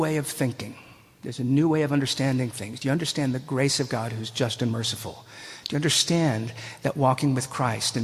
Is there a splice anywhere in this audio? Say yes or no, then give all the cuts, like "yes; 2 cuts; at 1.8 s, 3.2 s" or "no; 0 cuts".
no; 0 cuts